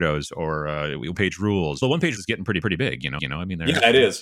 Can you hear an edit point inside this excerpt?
yes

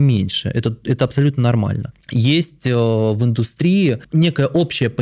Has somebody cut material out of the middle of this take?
no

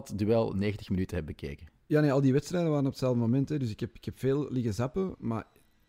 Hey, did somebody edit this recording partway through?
no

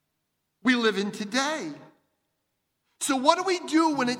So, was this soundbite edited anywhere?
no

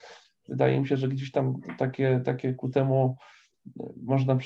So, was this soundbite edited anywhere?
no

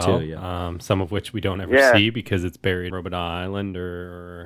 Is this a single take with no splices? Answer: no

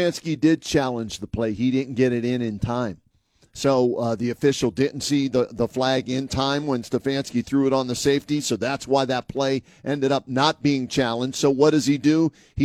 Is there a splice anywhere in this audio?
no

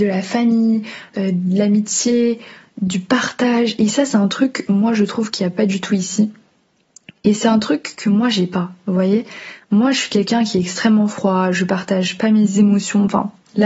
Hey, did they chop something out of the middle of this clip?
no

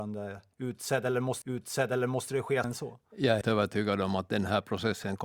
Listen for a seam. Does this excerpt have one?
yes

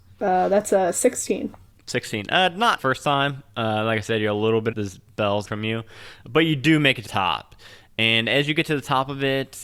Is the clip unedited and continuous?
no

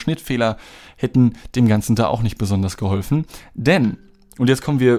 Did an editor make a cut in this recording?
no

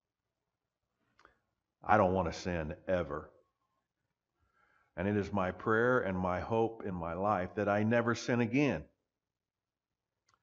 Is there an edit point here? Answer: no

